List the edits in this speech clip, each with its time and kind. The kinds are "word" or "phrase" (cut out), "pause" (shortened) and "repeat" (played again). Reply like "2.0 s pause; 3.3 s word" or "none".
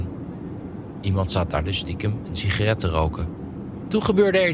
none